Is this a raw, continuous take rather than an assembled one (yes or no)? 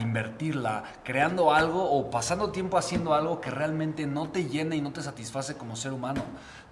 yes